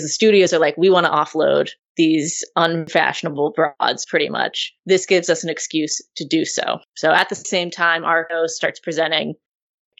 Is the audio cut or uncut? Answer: cut